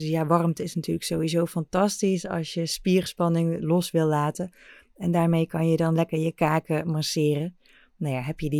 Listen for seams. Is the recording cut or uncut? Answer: uncut